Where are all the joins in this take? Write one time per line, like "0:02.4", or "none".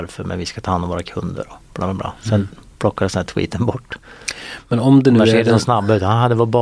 none